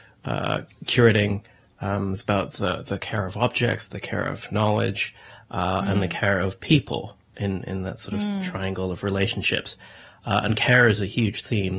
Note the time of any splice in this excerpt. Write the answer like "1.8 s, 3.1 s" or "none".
none

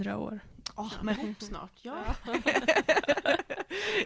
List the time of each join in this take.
1.2 s

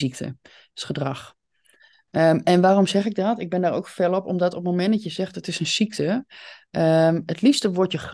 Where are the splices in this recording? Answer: none

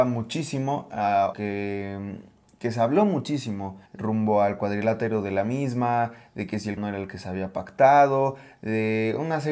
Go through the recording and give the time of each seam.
1.3 s, 3.9 s, 6.8 s

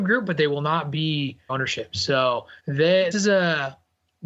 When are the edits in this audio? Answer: 1.5 s, 2.6 s, 3.1 s

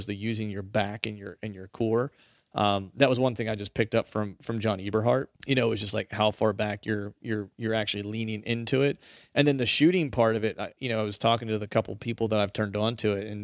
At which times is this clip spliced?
5.4 s

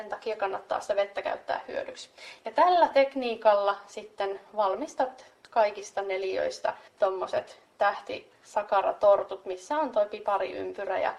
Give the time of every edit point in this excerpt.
6.9 s

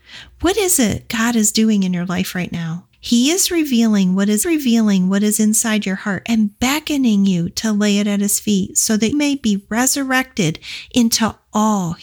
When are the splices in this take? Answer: 2.9 s, 4.4 s, 9.1 s

